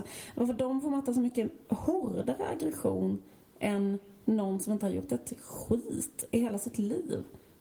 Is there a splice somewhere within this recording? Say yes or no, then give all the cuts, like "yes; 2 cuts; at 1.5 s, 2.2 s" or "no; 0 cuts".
no; 0 cuts